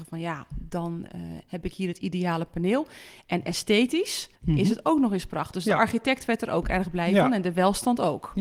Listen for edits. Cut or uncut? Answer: cut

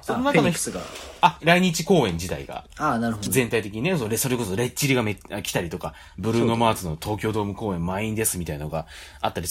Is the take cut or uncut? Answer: cut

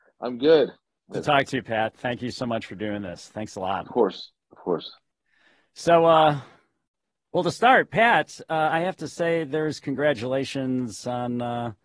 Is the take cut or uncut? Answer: cut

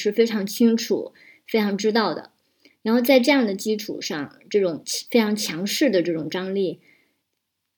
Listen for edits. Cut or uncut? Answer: uncut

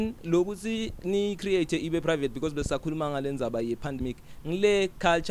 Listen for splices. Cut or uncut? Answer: uncut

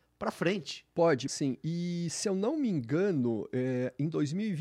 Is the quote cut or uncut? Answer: cut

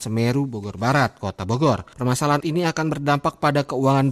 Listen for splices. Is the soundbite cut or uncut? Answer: cut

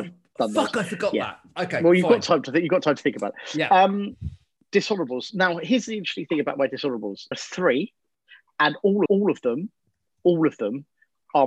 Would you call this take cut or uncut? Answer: cut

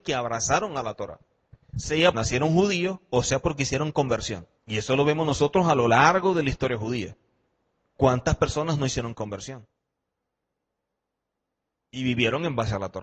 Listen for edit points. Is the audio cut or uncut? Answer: cut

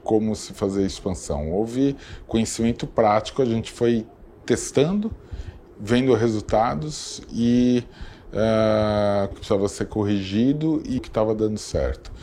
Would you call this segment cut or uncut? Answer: cut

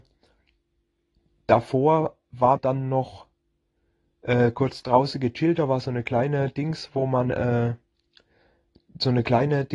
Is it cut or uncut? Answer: cut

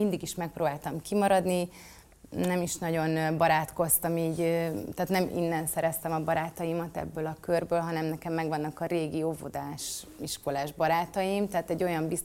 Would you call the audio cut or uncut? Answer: uncut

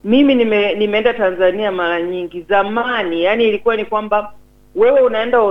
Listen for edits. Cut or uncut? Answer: uncut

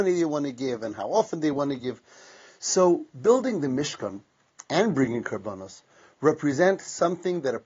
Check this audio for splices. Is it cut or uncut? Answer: uncut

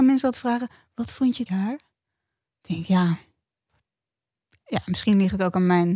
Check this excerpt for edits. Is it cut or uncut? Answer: cut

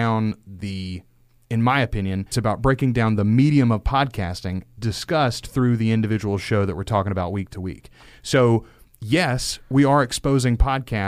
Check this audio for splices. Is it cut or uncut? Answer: cut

